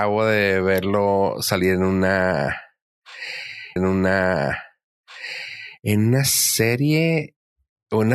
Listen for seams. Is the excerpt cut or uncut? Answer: cut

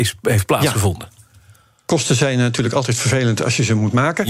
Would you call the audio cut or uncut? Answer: uncut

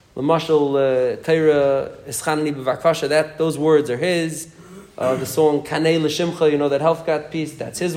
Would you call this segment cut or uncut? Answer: uncut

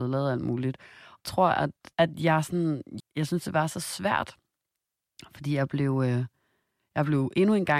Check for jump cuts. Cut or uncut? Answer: cut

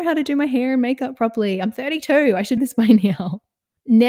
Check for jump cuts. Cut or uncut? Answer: cut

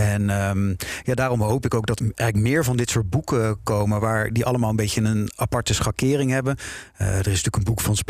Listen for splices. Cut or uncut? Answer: cut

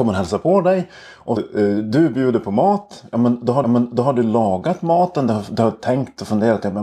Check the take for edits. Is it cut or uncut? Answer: cut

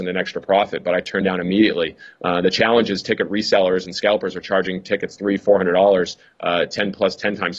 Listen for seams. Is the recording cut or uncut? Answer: uncut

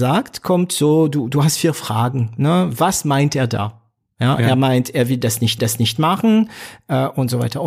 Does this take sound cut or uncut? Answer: cut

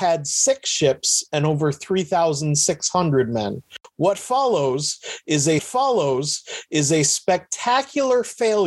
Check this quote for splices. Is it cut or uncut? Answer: cut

